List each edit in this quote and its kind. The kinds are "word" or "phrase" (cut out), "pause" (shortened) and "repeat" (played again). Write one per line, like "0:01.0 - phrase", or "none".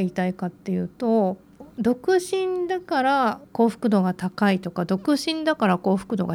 0:03.4 - pause